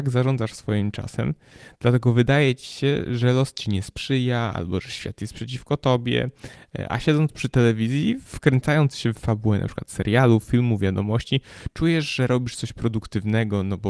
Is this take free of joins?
yes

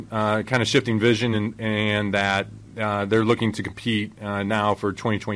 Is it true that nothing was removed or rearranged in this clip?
yes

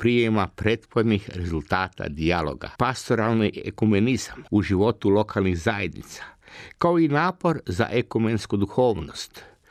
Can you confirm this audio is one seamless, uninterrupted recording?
no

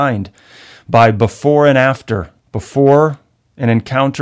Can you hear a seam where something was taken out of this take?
yes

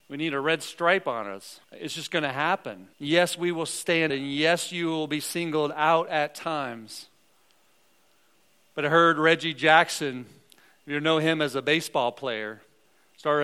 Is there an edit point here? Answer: yes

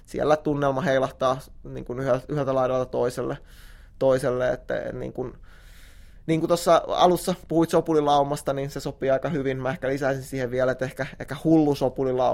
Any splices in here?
no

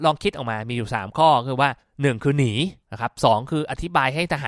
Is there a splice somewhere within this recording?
yes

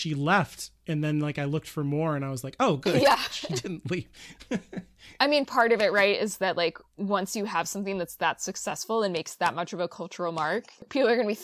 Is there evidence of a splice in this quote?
no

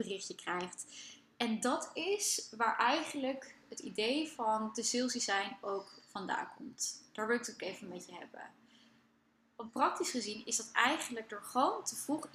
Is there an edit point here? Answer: no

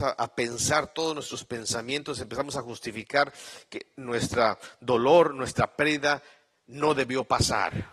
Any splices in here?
no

